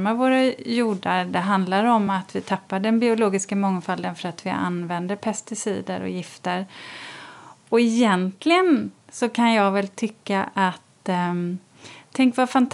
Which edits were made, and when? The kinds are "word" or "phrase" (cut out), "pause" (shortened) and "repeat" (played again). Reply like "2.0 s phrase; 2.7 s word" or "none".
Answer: none